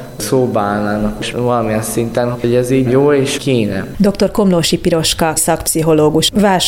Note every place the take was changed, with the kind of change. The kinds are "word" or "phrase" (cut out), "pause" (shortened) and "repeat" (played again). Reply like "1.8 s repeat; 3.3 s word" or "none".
1.3 s word; 2.3 s word; 2.9 s word; 3.4 s word; 5.4 s word